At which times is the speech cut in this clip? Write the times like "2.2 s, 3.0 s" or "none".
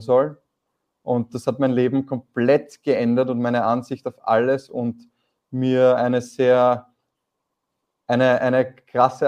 none